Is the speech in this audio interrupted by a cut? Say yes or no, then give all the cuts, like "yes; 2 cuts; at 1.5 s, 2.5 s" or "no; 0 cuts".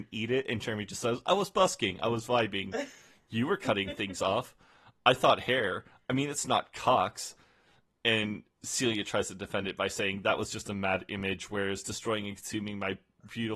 no; 0 cuts